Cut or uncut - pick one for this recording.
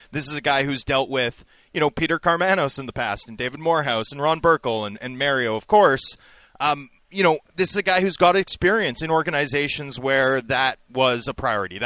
uncut